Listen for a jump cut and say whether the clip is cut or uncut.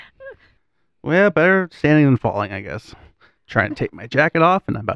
cut